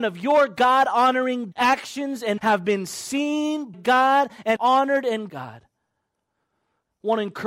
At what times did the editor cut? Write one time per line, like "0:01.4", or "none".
0:01.5
0:02.4
0:03.7
0:04.6
0:05.3